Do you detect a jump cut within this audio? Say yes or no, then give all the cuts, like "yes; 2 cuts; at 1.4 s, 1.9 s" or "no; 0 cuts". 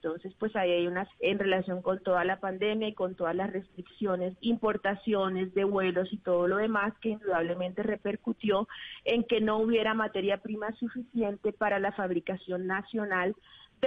yes; 2 cuts; at 1.1 s, 4.4 s